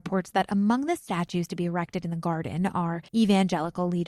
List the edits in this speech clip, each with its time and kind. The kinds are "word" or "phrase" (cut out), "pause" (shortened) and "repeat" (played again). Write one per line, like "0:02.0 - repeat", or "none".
0:03.1 - pause

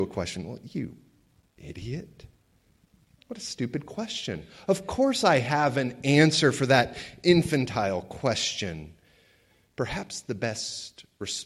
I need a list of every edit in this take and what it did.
none

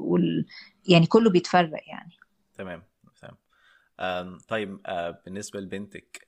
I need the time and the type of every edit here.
none

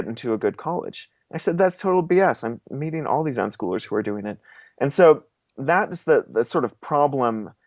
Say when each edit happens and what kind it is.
none

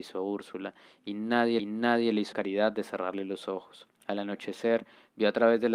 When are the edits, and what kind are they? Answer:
0:01.6 - repeat
0:02.3 - word
0:03.9 - pause

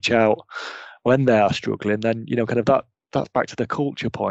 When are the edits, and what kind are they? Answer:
none

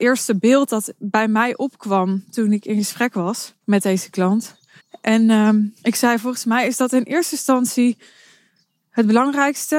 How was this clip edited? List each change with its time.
0:03.6 - pause
0:04.8 - pause
0:05.8 - pause

